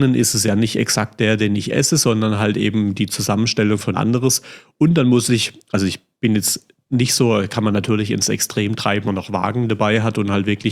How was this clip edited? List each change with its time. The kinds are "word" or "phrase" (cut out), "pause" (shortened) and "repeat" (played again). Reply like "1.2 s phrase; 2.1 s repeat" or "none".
3.9 s word; 9.0 s word